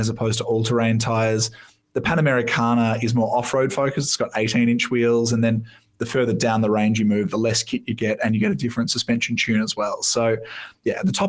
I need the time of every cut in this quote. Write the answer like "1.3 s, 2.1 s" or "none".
none